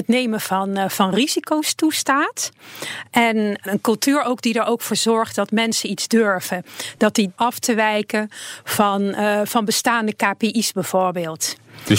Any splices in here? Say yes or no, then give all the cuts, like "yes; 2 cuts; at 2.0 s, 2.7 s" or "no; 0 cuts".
yes; 2 cuts; at 3.7 s, 7.4 s